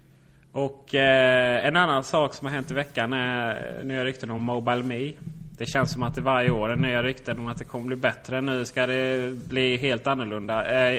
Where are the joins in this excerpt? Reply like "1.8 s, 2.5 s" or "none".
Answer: none